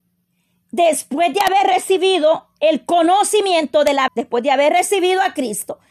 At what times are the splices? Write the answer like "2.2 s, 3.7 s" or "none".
4.1 s

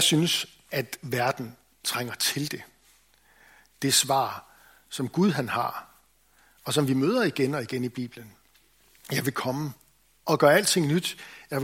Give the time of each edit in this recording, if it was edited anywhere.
none

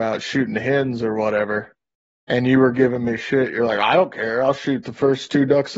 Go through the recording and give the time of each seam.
2.1 s

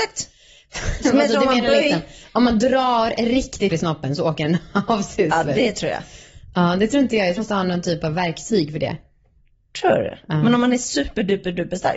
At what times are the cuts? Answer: 1.0 s, 3.7 s, 7.4 s

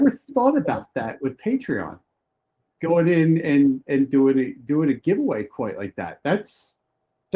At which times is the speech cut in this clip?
none

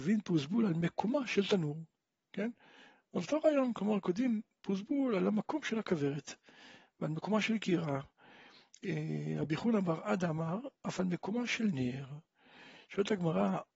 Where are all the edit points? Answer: none

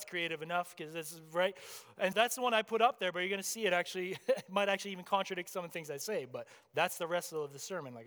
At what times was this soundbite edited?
2.1 s

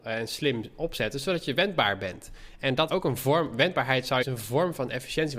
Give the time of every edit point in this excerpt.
2.9 s, 4.2 s

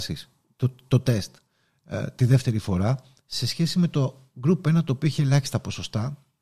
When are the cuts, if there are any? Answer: none

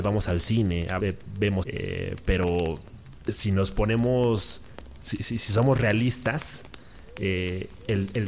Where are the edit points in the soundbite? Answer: 1.0 s, 1.6 s

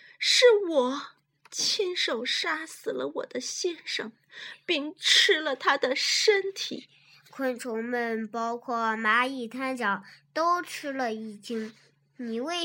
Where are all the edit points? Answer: none

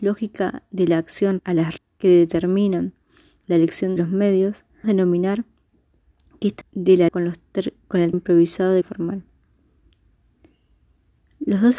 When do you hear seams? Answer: 1.4 s, 1.8 s, 4.0 s, 4.8 s, 6.6 s, 7.1 s, 8.1 s, 8.8 s

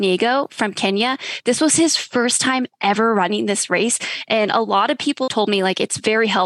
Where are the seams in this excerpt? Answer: 5.3 s

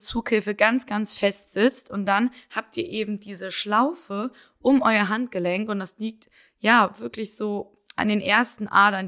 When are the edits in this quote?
none

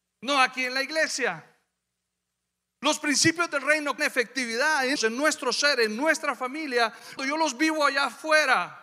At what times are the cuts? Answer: 4.0 s, 5.0 s, 7.2 s

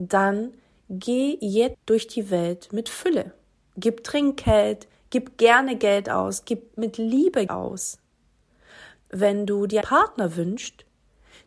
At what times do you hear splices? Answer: 1.7 s, 7.5 s, 9.8 s

